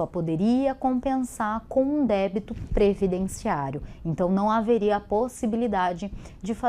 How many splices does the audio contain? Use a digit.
0